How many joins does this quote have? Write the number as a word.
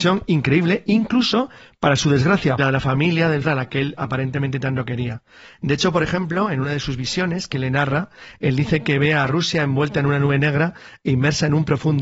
two